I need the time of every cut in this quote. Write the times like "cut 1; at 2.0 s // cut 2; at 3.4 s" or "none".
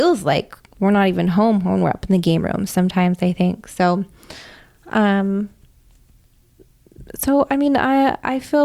cut 1; at 7.1 s